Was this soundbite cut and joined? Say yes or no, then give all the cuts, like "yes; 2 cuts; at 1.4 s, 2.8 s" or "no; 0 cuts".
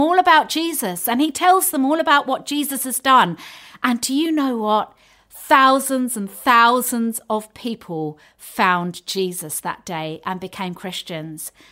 no; 0 cuts